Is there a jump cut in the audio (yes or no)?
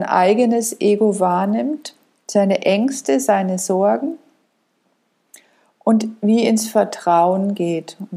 no